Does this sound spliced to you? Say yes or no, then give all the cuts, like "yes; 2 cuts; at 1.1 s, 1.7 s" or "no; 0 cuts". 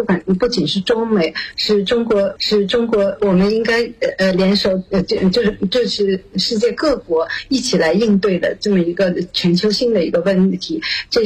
yes; 1 cut; at 2.4 s